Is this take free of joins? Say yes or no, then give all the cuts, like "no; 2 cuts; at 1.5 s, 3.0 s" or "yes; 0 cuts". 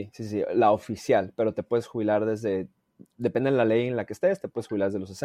yes; 0 cuts